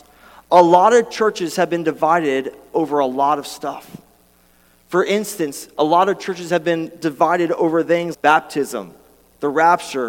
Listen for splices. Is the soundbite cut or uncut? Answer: cut